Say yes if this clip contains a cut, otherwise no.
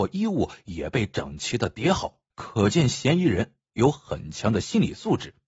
yes